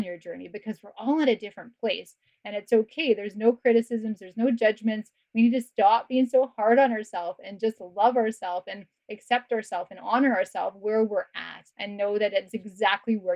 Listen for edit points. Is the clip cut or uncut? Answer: cut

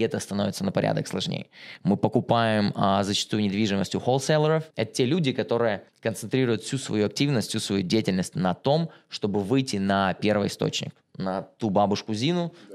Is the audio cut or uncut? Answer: cut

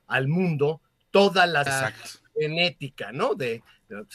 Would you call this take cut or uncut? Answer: cut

